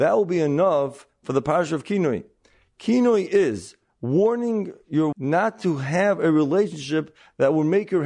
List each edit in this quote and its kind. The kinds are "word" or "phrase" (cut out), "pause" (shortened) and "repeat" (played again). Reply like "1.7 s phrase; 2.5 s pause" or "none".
5.1 s word